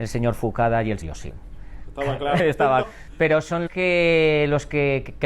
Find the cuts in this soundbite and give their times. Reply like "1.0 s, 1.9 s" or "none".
1.0 s, 2.4 s, 2.8 s, 3.7 s

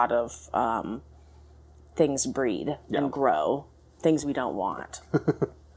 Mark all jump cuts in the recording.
none

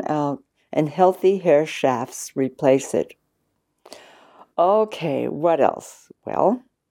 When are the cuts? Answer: none

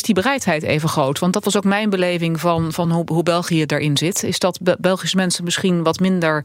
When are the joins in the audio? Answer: none

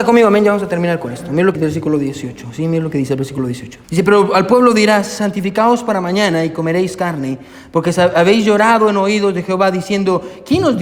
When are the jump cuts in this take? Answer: 1.5 s, 3.8 s

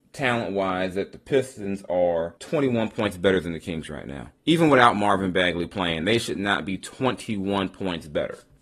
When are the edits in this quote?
2.4 s, 4.4 s

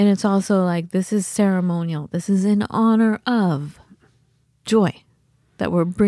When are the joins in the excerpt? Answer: none

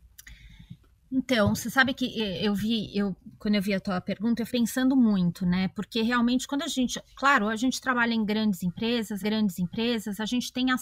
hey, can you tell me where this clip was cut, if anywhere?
4.5 s, 9.2 s

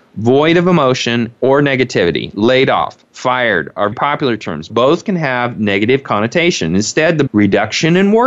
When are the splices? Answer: 3.9 s, 4.7 s, 7.3 s

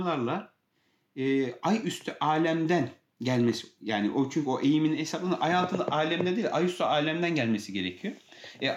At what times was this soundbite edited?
none

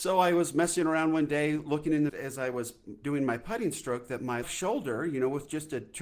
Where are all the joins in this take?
2.1 s, 4.4 s

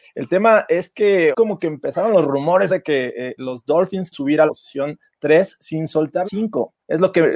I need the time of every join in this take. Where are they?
1.3 s, 2.7 s, 3.4 s, 4.1 s, 4.5 s, 6.2 s

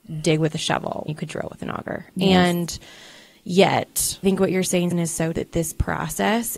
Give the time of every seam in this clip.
1.1 s, 4.2 s, 4.9 s, 5.3 s

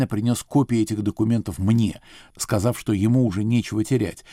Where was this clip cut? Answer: none

